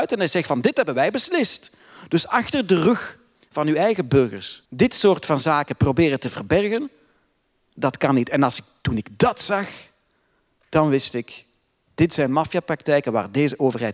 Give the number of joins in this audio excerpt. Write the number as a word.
one